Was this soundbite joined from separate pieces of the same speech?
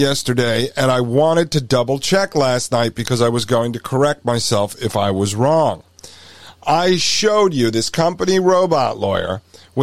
no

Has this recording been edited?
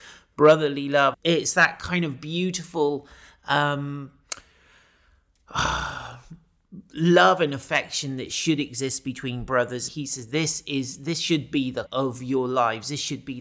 yes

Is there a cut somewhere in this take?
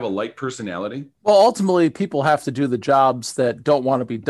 yes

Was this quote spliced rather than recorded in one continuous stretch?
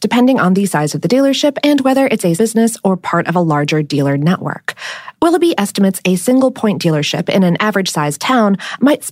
yes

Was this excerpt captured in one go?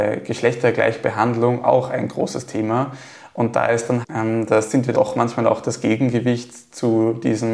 no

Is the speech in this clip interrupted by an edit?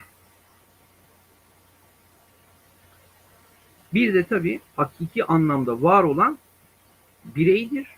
yes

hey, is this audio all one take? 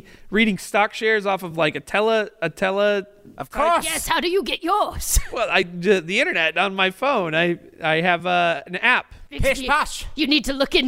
yes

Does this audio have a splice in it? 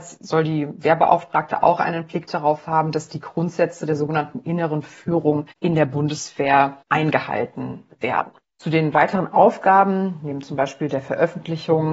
yes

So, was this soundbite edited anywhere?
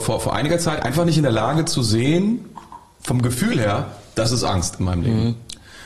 no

